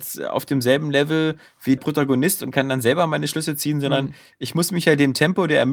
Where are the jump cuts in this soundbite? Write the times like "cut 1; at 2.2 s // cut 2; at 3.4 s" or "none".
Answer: cut 1; at 1.8 s